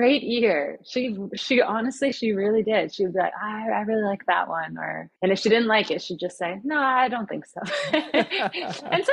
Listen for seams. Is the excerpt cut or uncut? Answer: cut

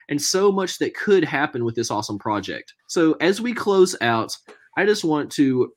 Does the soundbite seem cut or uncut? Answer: cut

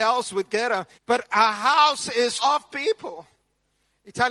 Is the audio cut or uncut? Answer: cut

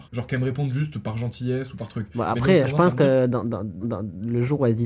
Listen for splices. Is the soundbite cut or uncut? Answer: cut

